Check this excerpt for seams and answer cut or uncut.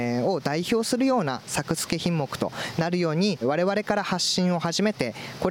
cut